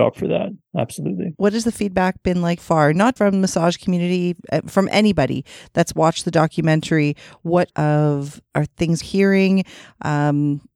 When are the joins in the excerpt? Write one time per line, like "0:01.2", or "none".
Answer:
0:02.6
0:03.2
0:07.7
0:09.0